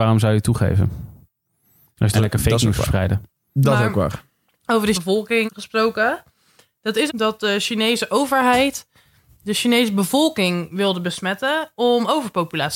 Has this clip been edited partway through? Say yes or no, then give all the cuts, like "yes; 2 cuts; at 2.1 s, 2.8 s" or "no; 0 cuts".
yes; 4 cuts; at 2.1 s, 4.9 s, 5.5 s, 7.1 s